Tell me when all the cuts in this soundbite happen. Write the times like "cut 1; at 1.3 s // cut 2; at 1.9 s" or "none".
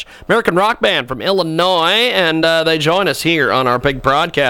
none